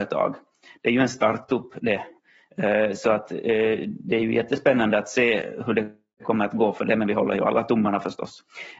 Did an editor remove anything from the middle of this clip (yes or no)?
no